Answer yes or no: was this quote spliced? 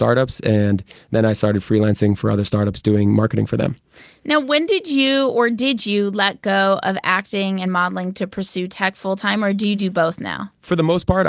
no